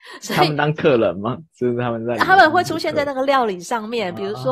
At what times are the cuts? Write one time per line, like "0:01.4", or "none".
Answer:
none